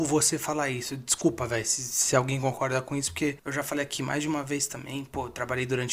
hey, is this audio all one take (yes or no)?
yes